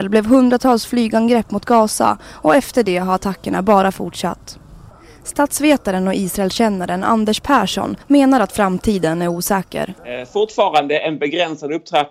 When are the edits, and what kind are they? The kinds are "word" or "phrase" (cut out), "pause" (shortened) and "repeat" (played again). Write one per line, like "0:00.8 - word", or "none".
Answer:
0:04.9 - pause
0:08.0 - pause
0:10.0 - pause

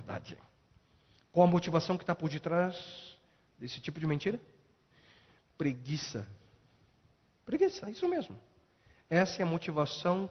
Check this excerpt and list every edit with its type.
none

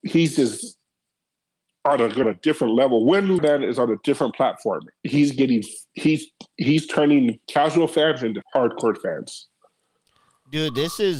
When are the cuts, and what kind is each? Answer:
0:02.2 - phrase
0:03.4 - phrase
0:05.9 - pause
0:07.4 - pause
0:08.4 - word

